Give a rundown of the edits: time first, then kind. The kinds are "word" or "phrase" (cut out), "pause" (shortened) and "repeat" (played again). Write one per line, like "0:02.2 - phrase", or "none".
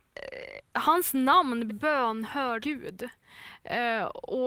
0:01.7 - word
0:02.6 - word